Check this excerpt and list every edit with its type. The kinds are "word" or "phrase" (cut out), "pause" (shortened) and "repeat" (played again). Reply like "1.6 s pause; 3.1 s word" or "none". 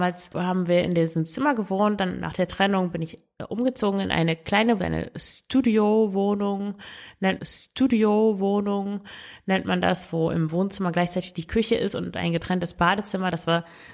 4.8 s word; 7.4 s repeat